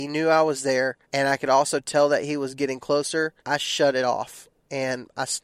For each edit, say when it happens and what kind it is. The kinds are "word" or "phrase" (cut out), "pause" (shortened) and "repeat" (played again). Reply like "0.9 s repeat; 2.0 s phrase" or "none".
1.0 s pause; 3.4 s pause

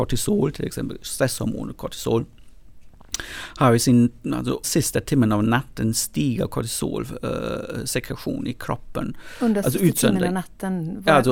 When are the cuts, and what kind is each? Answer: 4.6 s word

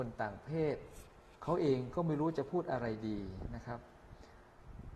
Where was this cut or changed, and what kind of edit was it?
1.4 s pause

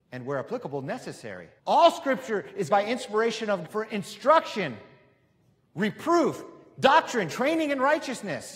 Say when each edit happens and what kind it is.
1.6 s pause; 2.7 s word; 3.7 s phrase

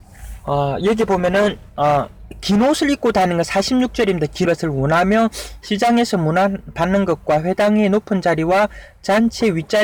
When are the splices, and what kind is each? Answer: 4.5 s phrase

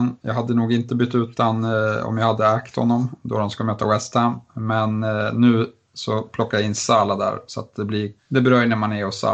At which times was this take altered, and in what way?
8.2 s pause

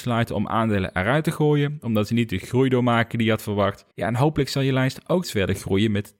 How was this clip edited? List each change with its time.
3.9 s pause; 5.2 s word

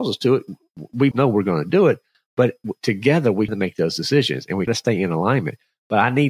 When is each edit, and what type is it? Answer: 1.1 s word; 3.5 s word; 4.7 s word

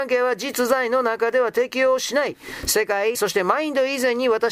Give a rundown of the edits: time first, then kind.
3.1 s phrase

